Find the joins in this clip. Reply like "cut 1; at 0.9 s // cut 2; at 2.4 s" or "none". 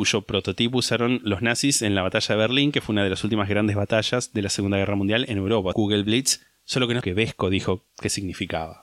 cut 1; at 5.7 s // cut 2; at 7.0 s // cut 3; at 7.9 s